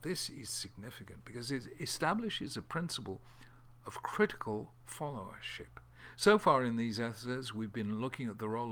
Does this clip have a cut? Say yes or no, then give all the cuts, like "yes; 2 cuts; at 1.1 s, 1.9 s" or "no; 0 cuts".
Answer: no; 0 cuts